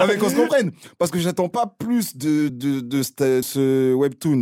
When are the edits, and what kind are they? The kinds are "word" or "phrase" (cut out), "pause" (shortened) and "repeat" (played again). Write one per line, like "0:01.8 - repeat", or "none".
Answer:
0:02.5 - word
0:03.4 - word